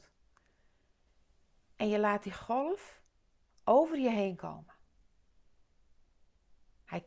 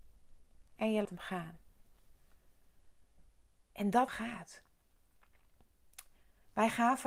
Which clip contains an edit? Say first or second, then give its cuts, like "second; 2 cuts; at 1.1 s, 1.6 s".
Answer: second; 3 cuts; at 1.0 s, 3.5 s, 4.1 s